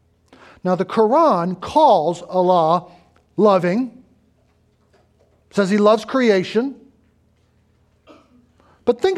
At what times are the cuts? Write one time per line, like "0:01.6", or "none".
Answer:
none